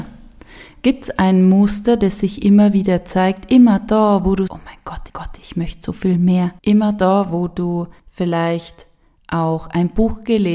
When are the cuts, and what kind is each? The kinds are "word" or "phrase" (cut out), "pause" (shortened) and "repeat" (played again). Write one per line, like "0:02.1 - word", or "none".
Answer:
0:04.5 - word
0:05.1 - repeat
0:06.6 - pause
0:08.0 - pause